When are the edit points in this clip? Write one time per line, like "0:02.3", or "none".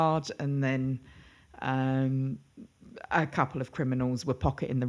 none